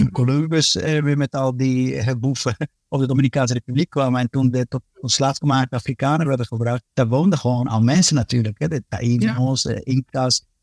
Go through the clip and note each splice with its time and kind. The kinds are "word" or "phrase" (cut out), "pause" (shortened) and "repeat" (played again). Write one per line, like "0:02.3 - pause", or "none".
0:06.9 - pause